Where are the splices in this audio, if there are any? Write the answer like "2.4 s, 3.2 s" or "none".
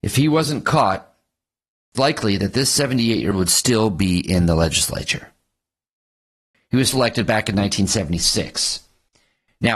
1.9 s, 3.3 s, 6.9 s